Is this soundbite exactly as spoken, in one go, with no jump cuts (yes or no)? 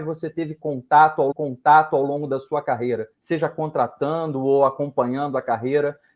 no